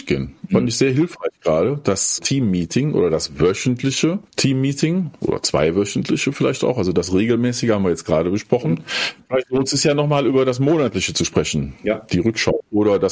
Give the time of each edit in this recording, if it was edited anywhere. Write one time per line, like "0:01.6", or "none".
0:02.2
0:04.3